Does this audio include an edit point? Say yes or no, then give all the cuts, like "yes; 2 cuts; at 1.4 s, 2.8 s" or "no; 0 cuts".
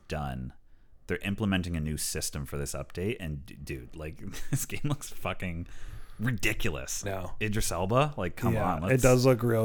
yes; 1 cut; at 7.0 s